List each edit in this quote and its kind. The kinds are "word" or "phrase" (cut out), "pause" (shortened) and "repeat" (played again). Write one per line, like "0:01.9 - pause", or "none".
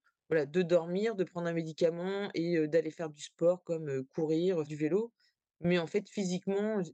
0:04.6 - word